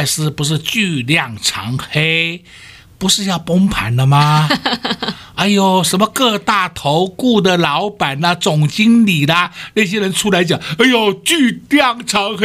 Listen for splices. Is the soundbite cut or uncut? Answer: uncut